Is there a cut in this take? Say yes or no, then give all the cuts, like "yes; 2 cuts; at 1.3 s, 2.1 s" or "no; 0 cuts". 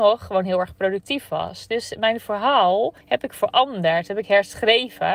yes; 1 cut; at 3.0 s